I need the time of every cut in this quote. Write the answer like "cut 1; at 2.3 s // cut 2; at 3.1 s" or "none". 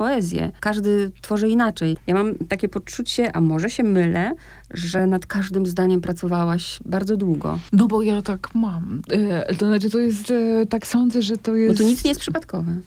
none